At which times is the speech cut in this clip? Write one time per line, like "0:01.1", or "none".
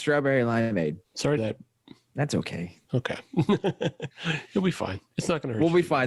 0:01.0
0:01.4
0:02.8